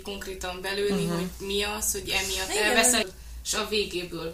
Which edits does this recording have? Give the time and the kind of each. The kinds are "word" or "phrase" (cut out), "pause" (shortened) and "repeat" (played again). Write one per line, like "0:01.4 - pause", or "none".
0:02.1 - word
0:03.0 - word